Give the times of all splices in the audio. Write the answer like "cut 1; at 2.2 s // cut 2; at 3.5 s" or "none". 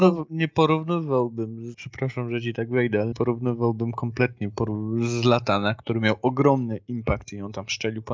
cut 1; at 1.7 s // cut 2; at 3.1 s